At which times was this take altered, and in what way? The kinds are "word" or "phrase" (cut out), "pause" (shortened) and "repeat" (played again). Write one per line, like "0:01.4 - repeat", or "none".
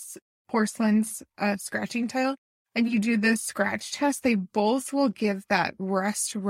none

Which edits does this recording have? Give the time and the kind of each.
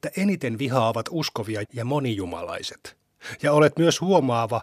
0:01.6 - word

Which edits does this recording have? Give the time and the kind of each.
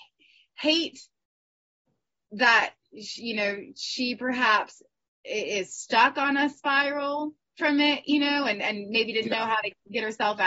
none

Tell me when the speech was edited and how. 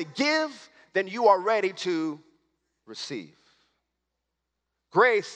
none

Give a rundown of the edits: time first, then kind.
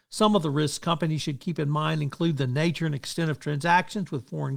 none

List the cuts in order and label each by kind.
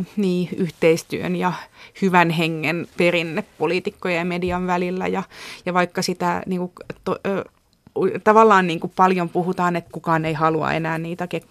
0:02.9 - pause
0:09.9 - phrase

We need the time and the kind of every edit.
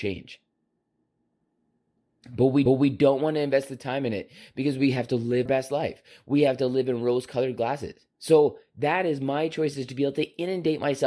0:02.7 - repeat
0:05.5 - word
0:08.1 - pause

